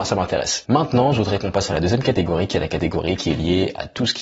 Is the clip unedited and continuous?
yes; 0 cuts

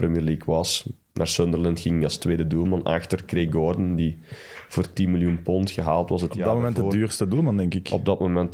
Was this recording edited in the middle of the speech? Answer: no; 0 cuts

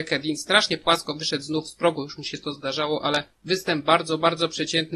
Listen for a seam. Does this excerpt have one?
no; 0 cuts

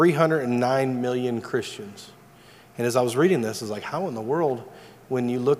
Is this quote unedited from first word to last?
yes; 0 cuts

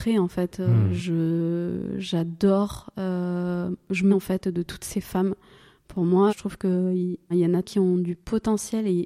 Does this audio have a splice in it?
yes; 4 cuts; at 4.1 s, 6.3 s, 7.3 s, 7.6 s

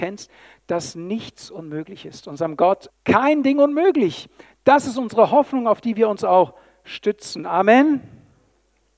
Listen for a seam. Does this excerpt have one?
yes; 1 cut; at 2.9 s

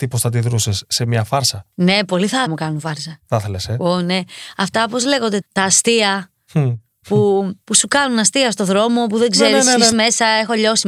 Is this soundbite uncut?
no; 5 cuts; at 1.7 s, 2.5 s, 5.4 s, 7.6 s, 9.9 s

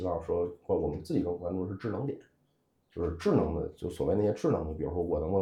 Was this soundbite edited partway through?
no; 0 cuts

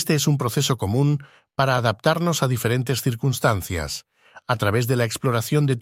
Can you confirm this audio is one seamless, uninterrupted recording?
yes; 0 cuts

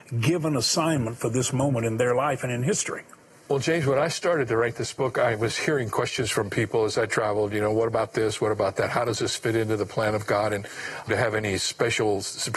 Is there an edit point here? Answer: yes; 1 cut; at 11.1 s

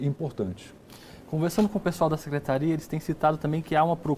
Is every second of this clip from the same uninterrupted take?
yes; 0 cuts

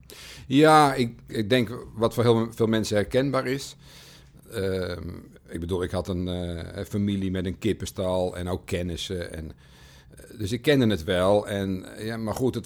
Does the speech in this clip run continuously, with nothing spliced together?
no; 1 cut; at 1.3 s

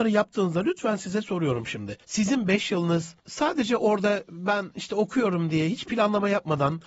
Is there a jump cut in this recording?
yes; 2 cuts; at 2.0 s, 3.2 s

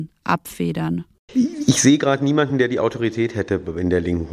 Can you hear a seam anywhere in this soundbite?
no; 0 cuts

